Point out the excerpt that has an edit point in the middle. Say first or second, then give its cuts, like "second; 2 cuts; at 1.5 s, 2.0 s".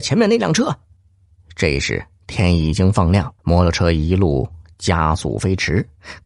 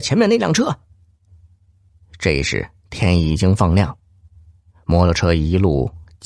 first; 2 cuts; at 1.0 s, 3.4 s